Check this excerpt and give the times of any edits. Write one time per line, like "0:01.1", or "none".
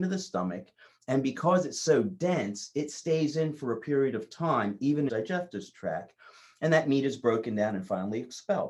0:05.1